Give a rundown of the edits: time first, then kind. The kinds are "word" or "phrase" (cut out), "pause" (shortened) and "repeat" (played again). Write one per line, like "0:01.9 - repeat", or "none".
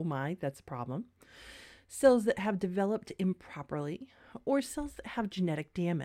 none